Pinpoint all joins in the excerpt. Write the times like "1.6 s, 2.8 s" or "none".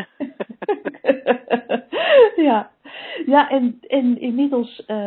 3.5 s